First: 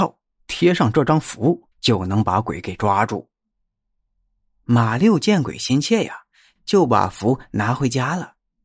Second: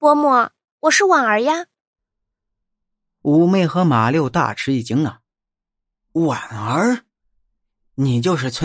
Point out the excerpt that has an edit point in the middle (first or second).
first